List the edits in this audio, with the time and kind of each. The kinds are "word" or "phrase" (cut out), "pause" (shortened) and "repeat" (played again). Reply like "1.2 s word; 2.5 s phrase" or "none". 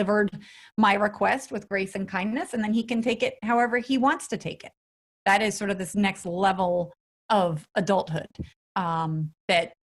none